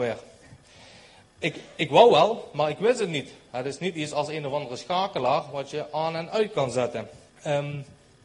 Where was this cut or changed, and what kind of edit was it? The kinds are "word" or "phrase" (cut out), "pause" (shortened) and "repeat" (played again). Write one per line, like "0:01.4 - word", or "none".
0:07.3 - pause